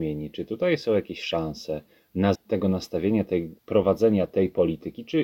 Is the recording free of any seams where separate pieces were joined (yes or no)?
no